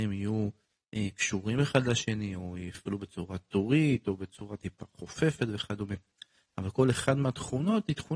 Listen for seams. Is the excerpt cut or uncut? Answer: uncut